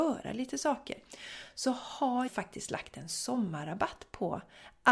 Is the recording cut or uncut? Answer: cut